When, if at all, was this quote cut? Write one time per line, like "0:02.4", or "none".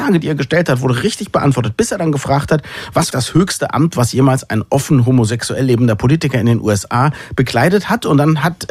0:03.1